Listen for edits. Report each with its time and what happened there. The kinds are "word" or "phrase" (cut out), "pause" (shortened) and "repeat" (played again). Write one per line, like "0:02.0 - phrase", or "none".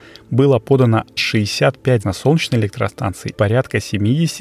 0:01.2 - word
0:02.0 - word
0:03.3 - word